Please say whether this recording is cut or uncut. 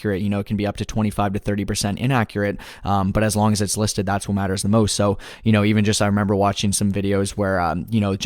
uncut